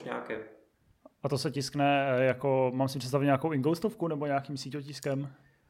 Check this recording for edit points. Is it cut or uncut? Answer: uncut